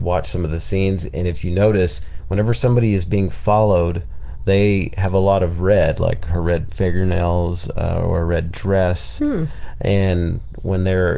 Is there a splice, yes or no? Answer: no